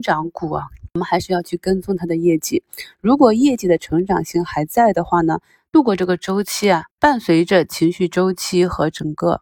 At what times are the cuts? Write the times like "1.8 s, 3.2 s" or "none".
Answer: 6.9 s